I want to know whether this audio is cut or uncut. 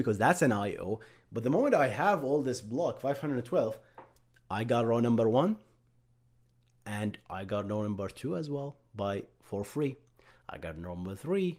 uncut